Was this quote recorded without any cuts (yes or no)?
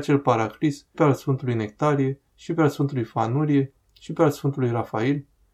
no